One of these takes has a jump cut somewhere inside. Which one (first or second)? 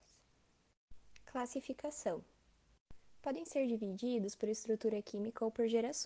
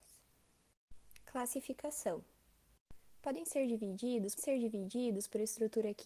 second